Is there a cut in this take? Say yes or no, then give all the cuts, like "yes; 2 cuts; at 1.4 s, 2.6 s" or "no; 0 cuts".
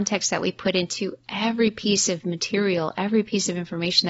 no; 0 cuts